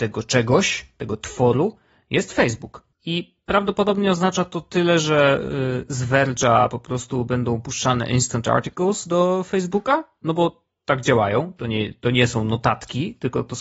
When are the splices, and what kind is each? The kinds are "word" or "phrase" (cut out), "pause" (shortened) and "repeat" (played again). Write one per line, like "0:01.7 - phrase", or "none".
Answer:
0:02.9 - pause